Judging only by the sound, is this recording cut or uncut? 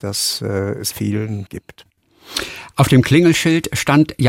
cut